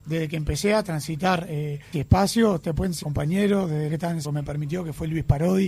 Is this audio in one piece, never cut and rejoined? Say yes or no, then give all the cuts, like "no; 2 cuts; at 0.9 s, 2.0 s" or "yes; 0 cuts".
no; 4 cuts; at 1.9 s, 3.0 s, 3.9 s, 4.2 s